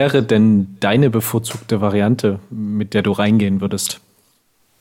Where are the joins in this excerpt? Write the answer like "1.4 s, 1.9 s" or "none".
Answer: none